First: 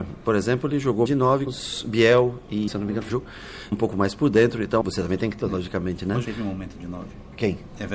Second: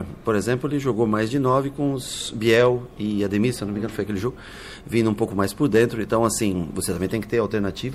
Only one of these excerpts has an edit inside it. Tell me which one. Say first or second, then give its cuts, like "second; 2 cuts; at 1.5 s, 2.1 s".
first; 8 cuts; at 1.1 s, 1.5 s, 2.7 s, 3.1 s, 3.7 s, 4.8 s, 5.4 s, 6.2 s